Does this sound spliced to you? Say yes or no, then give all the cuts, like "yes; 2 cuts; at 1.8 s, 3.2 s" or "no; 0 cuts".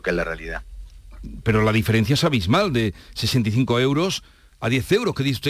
no; 0 cuts